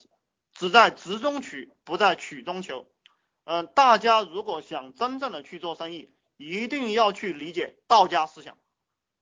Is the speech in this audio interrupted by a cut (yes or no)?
yes